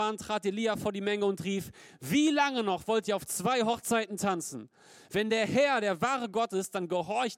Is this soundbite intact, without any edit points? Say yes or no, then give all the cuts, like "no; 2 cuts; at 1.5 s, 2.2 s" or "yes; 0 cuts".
yes; 0 cuts